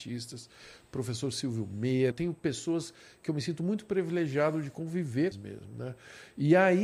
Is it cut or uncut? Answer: cut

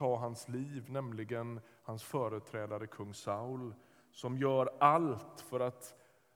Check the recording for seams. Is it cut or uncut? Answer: uncut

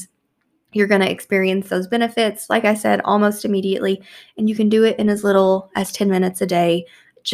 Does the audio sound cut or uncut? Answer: uncut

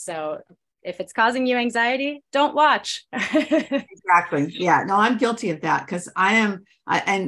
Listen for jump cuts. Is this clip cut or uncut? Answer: uncut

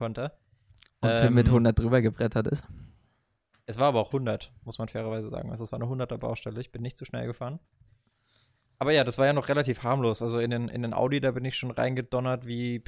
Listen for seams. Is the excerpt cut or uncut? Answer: uncut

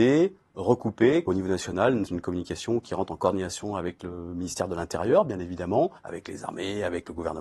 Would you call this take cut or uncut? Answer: cut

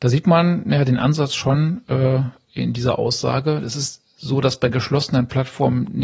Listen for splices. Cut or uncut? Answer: uncut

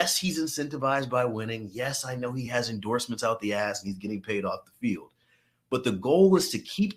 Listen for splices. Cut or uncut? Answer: uncut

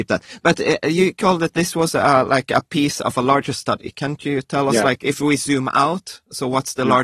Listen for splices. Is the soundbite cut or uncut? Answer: uncut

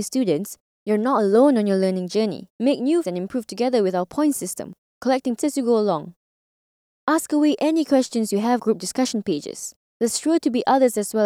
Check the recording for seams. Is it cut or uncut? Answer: cut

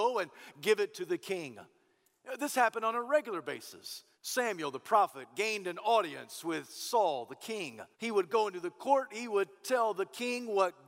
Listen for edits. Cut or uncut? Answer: cut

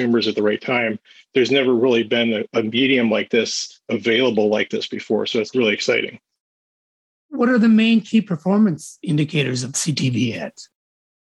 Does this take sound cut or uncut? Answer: uncut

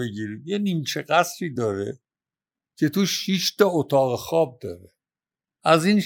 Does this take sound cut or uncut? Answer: uncut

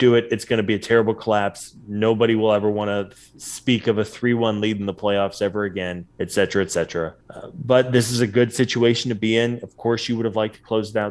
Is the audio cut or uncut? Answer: cut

